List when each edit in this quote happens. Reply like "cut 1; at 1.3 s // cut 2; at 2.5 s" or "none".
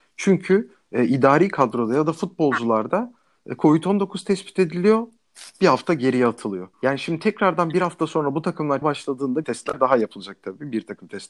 cut 1; at 6.7 s // cut 2; at 8.8 s // cut 3; at 9.4 s